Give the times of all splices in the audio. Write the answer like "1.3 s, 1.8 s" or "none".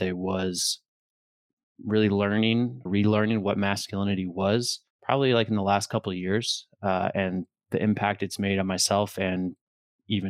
2.9 s, 4.9 s